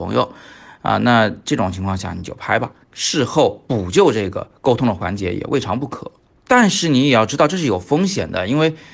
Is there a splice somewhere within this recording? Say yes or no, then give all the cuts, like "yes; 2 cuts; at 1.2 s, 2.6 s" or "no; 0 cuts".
no; 0 cuts